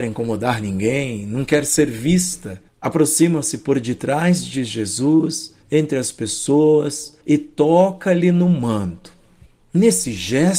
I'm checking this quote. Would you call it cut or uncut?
cut